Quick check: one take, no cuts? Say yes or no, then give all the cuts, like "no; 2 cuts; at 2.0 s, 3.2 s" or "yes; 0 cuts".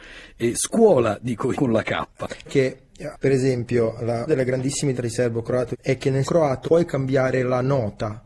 no; 8 cuts; at 1.5 s, 2.5 s, 3.1 s, 4.3 s, 4.9 s, 5.7 s, 6.2 s, 6.6 s